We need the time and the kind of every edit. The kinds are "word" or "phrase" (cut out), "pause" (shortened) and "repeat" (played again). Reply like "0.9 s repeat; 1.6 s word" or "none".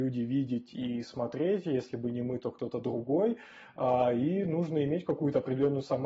none